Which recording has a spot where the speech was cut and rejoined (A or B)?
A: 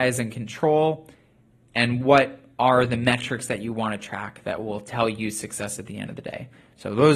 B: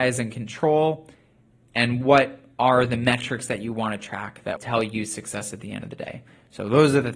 B